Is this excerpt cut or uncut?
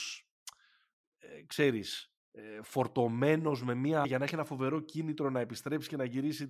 cut